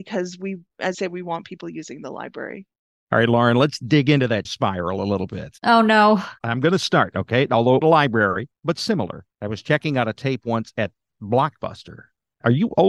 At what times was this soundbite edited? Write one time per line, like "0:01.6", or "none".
0:00.9
0:04.4
0:07.8

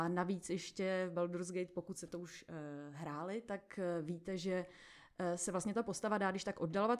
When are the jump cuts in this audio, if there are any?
none

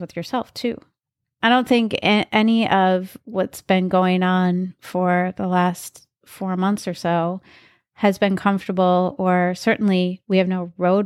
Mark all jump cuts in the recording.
none

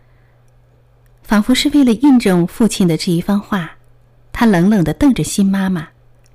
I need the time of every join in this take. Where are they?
none

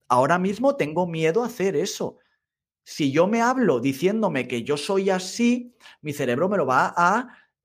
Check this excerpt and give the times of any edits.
none

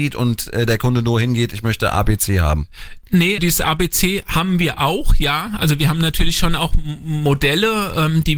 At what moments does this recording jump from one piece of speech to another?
0:03.4

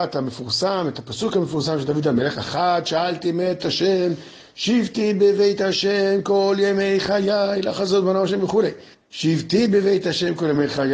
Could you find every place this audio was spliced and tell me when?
0:08.9

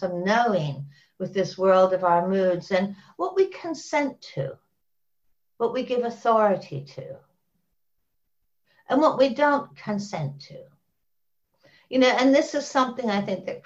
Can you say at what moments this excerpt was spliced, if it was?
none

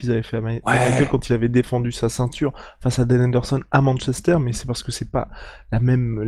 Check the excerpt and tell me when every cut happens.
none

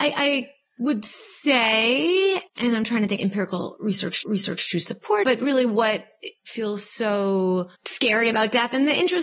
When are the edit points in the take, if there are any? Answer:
0:02.5
0:03.2
0:04.2
0:05.2
0:07.7

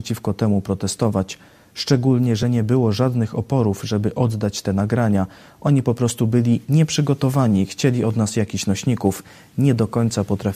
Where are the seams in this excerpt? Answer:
none

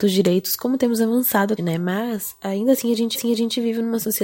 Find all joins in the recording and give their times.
0:01.6
0:03.1

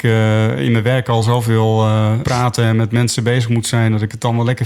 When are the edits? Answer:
0:02.2

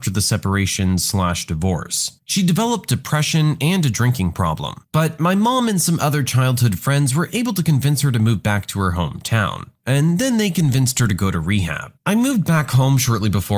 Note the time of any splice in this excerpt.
none

